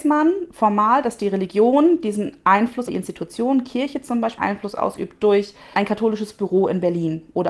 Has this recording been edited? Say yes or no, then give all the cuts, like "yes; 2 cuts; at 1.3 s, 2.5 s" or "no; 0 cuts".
yes; 3 cuts; at 2.9 s, 4.4 s, 5.7 s